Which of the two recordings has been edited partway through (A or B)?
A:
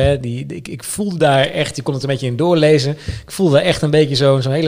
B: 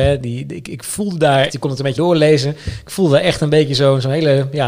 B